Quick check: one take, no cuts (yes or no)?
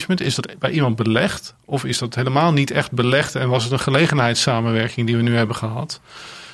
yes